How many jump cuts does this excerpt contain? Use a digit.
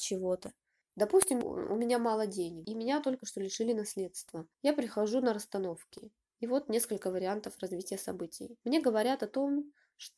1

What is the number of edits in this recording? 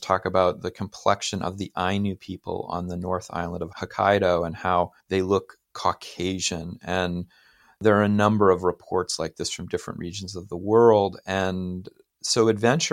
1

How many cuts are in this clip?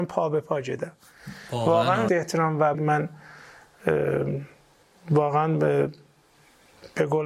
2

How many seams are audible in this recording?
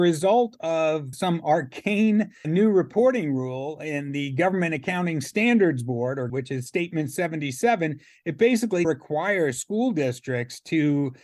4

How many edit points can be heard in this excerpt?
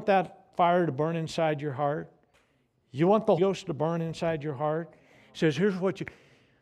1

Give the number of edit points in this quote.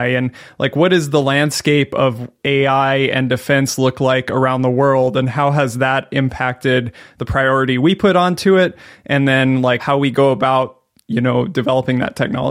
0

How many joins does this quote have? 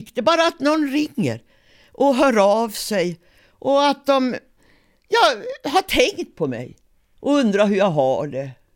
0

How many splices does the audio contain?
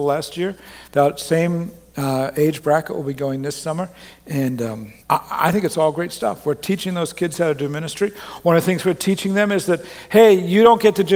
1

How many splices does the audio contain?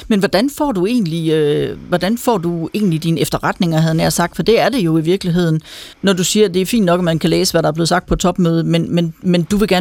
1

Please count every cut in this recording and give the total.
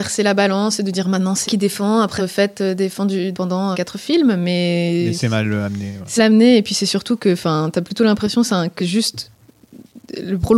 6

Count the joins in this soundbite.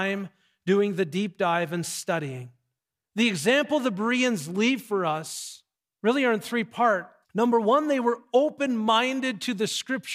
3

